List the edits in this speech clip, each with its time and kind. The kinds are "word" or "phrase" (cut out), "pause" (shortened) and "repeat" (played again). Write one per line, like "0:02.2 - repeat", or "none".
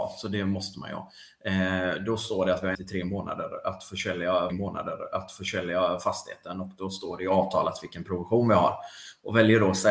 0:02.7 - word
0:04.5 - repeat